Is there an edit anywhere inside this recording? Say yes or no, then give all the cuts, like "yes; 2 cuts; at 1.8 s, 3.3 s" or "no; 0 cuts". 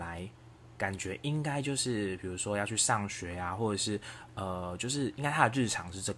no; 0 cuts